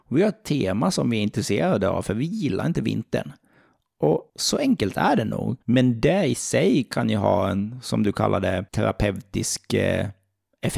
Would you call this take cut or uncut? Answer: cut